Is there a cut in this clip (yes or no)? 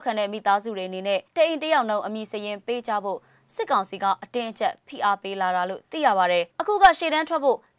yes